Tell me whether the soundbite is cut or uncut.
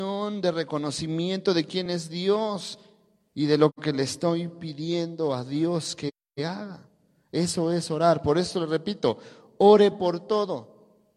uncut